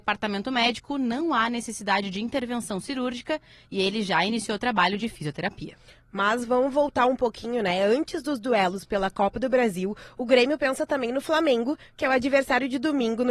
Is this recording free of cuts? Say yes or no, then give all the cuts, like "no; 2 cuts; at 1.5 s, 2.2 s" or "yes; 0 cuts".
yes; 0 cuts